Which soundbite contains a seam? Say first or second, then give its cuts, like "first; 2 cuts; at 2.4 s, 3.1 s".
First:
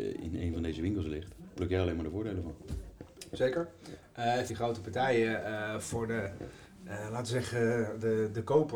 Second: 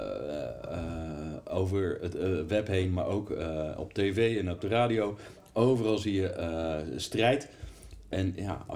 first; 1 cut; at 4.5 s